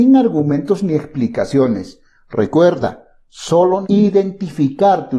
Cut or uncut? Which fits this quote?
cut